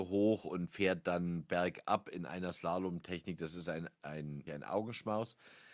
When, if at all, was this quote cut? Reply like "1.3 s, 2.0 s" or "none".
4.5 s

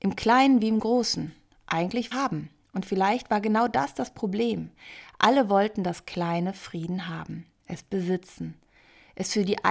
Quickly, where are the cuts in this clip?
2.1 s

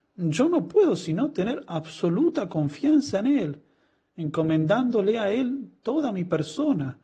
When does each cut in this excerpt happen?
none

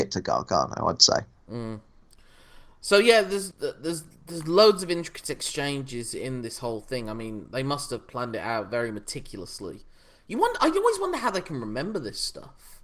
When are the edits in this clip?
3.5 s

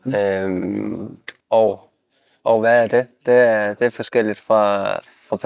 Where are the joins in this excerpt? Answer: 1.4 s

